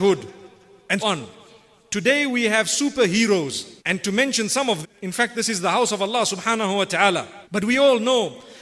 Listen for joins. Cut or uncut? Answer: cut